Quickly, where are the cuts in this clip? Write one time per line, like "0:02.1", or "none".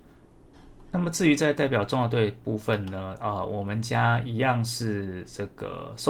none